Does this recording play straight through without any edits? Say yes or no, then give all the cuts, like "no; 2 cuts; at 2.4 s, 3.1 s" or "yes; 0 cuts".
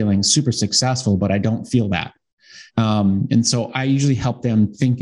no; 1 cut; at 2.7 s